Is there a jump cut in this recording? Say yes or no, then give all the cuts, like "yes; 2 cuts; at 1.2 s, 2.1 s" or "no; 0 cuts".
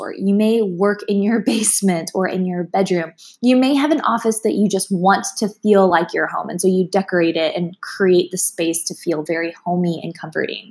no; 0 cuts